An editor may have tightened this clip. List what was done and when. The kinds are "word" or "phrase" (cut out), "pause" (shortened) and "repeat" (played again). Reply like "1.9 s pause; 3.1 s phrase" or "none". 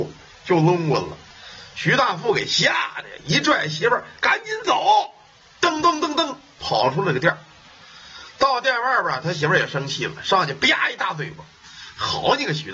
none